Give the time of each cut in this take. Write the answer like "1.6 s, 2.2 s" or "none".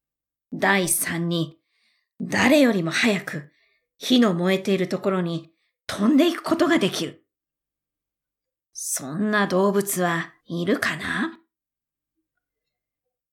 10.4 s